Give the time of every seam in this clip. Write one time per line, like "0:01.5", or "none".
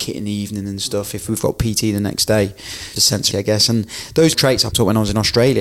0:03.0
0:03.3
0:04.3
0:04.7